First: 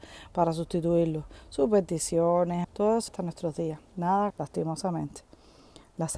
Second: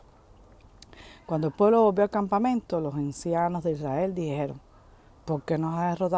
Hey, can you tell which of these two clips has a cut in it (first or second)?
first